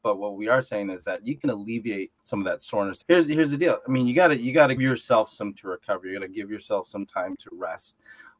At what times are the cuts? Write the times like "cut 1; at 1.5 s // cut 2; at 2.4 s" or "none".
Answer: cut 1; at 2.2 s // cut 2; at 3.0 s // cut 3; at 4.8 s // cut 4; at 5.5 s